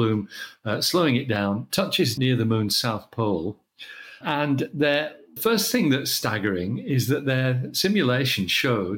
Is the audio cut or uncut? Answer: cut